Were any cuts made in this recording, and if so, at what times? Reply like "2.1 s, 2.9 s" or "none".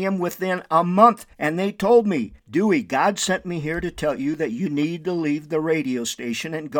1.3 s, 2.4 s